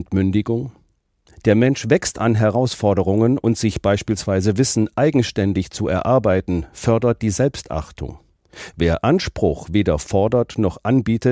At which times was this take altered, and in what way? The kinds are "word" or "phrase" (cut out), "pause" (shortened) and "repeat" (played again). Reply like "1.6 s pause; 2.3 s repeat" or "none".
none

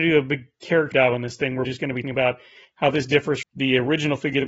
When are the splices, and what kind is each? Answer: 0.9 s word; 1.6 s word; 2.0 s word; 3.4 s word

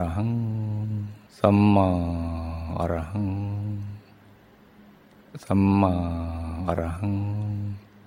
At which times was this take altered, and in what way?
1.3 s pause

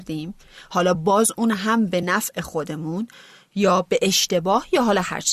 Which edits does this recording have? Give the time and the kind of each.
none

